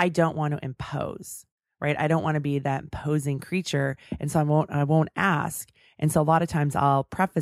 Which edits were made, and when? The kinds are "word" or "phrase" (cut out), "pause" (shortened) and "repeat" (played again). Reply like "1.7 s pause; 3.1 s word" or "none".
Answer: none